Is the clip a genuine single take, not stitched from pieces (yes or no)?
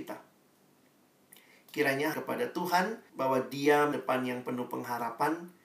no